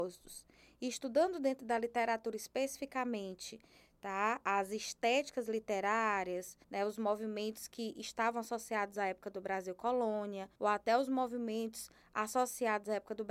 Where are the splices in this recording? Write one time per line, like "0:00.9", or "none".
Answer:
0:06.6
0:10.6